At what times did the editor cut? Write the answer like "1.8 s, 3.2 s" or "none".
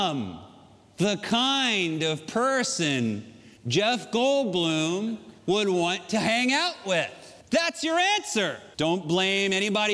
3.6 s, 5.4 s, 7.4 s, 8.7 s